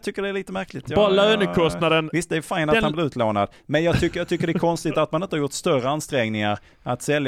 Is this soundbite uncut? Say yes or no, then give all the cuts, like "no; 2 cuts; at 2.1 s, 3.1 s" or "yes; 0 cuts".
yes; 0 cuts